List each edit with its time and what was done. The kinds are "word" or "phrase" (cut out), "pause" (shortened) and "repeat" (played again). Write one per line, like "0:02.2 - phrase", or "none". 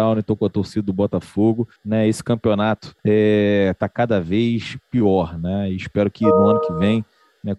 0:01.8 - pause
0:03.0 - pause